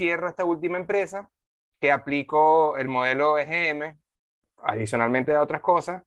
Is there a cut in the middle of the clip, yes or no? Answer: no